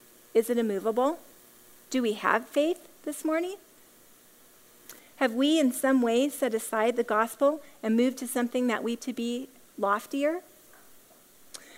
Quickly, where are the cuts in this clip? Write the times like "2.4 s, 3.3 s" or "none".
9.0 s